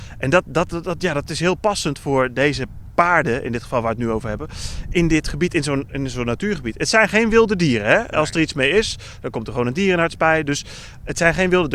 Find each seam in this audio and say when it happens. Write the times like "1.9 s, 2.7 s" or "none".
none